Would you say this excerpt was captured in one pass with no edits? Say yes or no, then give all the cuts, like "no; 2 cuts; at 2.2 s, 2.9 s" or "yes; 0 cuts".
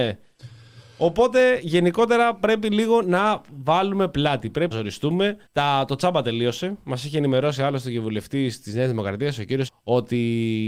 no; 3 cuts; at 4.7 s, 5.5 s, 9.7 s